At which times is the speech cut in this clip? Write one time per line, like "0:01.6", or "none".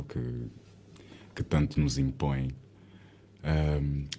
none